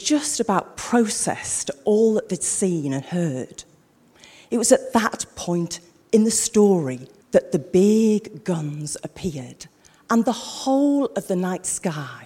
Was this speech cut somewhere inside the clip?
no; 0 cuts

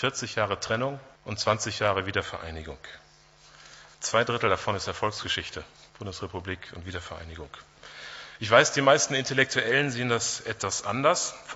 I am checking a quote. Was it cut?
yes; 3 cuts; at 1.2 s, 3.9 s, 5.9 s

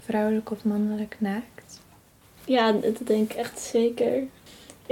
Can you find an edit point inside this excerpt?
no; 0 cuts

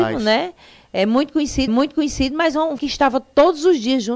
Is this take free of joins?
no; 2 cuts; at 1.7 s, 2.8 s

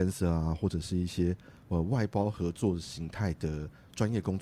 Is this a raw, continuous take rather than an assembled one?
yes; 0 cuts

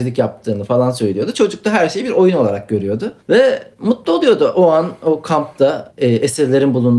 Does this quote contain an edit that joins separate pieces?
no; 0 cuts

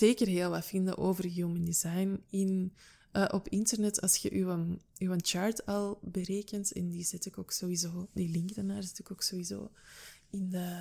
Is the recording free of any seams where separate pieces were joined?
yes; 0 cuts

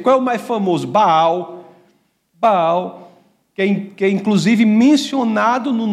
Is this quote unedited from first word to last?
yes; 0 cuts

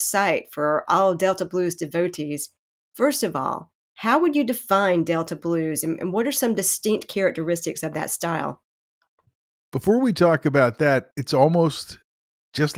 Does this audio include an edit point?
no; 0 cuts

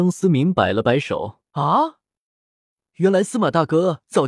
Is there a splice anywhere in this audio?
yes; 1 cut; at 1.5 s

